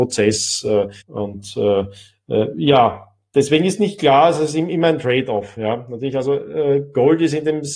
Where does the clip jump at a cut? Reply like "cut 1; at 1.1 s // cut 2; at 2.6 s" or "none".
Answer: cut 1; at 1.0 s